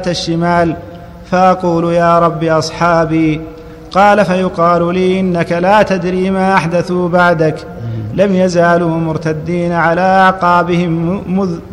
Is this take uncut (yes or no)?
yes